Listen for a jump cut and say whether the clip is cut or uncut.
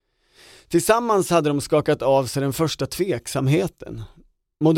uncut